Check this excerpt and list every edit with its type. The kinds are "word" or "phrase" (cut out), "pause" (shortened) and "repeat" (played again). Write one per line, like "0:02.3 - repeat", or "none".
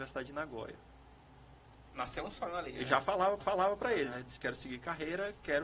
0:03.4 - repeat
0:04.4 - word